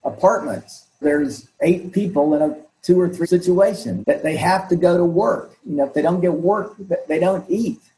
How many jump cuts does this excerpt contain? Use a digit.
3